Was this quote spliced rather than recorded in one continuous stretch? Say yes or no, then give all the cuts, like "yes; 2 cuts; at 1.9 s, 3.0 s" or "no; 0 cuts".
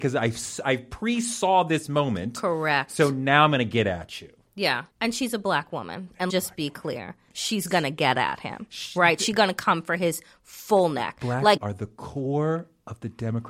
yes; 3 cuts; at 4.9 s, 6.3 s, 11.6 s